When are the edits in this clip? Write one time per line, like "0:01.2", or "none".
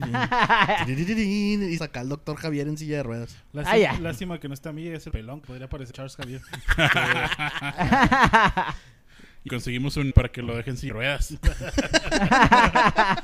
0:01.8
0:05.1
0:05.4
0:05.9
0:09.5
0:10.1
0:10.9

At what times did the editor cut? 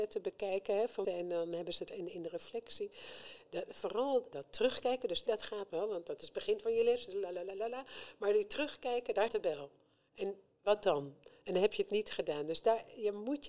0:01.0
0:01.9
0:04.3
0:05.3
0:05.7
0:09.3

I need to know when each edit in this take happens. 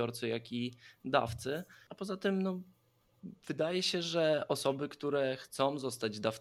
none

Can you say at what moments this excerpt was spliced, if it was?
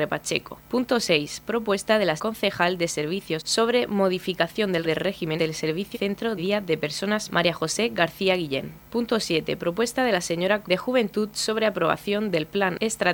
0:02.2
0:03.4
0:04.8
0:05.4
0:05.9
0:06.4
0:07.3
0:10.6

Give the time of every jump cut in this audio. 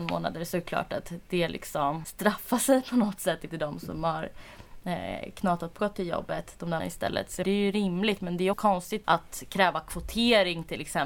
0:02.0
0:03.5
0:05.8
0:06.8
0:07.4
0:08.5
0:09.0

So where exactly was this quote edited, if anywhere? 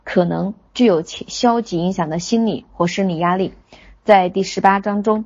none

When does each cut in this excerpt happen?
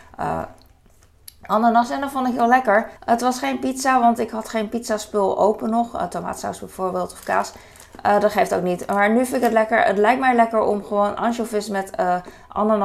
0:03.0

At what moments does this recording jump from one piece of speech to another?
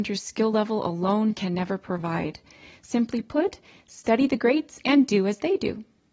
none

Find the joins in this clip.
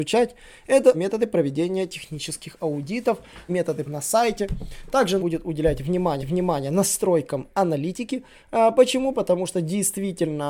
0:00.9
0:03.5
0:03.8
0:05.2
0:06.2

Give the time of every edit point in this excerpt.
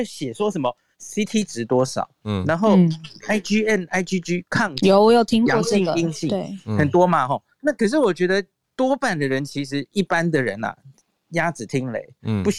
none

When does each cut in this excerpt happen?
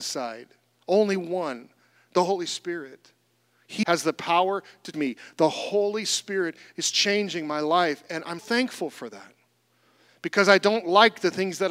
0:03.8
0:04.9
0:08.4

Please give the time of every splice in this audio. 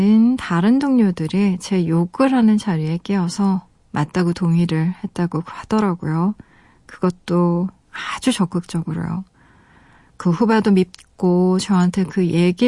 none

